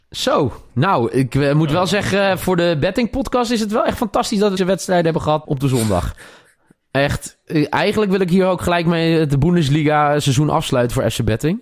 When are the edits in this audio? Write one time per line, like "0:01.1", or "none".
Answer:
0:04.6
0:05.4